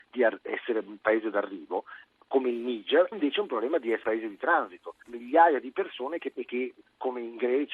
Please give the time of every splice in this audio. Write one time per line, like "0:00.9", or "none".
0:03.1
0:04.0
0:05.0
0:06.3